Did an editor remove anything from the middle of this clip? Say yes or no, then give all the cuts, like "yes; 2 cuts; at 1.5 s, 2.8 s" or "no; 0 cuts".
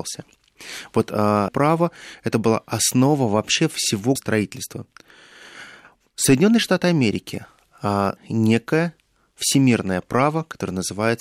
yes; 3 cuts; at 1.5 s, 4.2 s, 8.2 s